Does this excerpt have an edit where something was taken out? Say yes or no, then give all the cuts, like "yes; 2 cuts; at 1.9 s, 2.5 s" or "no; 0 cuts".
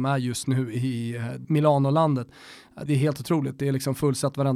yes; 2 cuts; at 1.4 s, 2.9 s